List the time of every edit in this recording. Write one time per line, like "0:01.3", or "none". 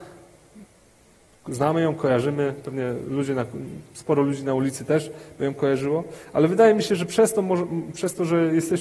none